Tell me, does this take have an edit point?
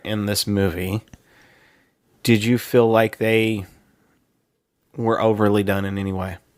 no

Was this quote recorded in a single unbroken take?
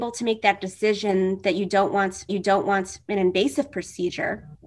no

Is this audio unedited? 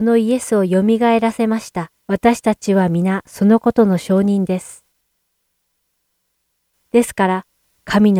no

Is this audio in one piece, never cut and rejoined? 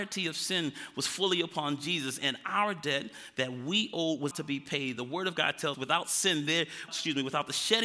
no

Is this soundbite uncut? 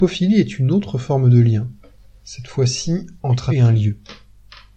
no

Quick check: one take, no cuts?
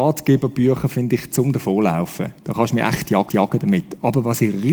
no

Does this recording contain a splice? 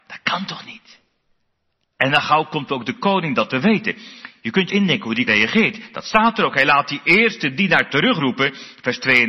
yes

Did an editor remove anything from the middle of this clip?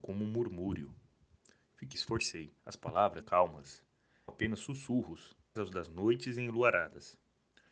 yes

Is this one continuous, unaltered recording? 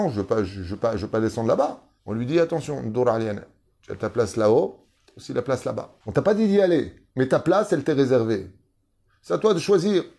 no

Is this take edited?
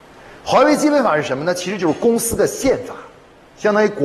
no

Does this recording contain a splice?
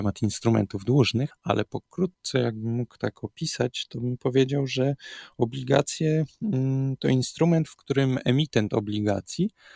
no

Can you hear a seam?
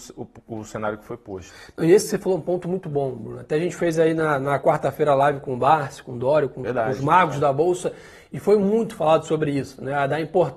no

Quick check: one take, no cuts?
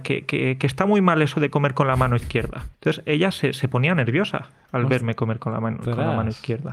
no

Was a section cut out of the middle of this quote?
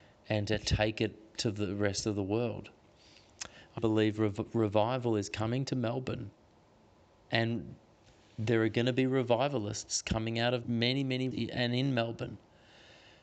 yes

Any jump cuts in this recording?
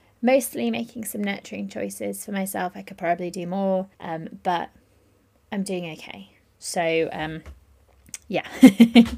yes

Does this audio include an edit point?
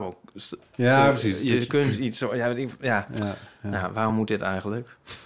no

